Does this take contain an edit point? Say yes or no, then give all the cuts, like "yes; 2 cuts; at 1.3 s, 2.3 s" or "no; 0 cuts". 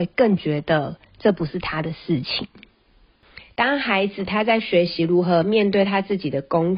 no; 0 cuts